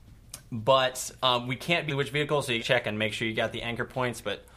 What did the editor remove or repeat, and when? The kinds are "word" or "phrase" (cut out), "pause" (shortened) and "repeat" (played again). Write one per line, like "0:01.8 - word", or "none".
0:01.9 - phrase
0:02.6 - word